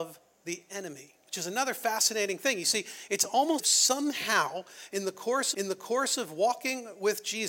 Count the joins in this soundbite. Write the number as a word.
three